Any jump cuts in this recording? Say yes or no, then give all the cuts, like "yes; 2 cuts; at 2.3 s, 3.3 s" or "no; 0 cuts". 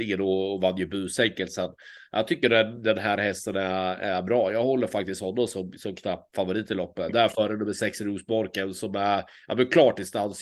no; 0 cuts